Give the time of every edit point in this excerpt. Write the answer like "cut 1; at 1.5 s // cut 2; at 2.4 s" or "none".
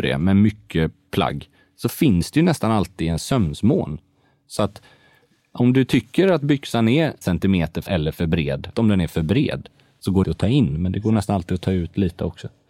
cut 1; at 7.2 s // cut 2; at 7.9 s // cut 3; at 8.7 s // cut 4; at 10.2 s